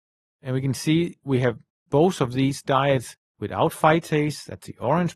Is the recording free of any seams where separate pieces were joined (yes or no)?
yes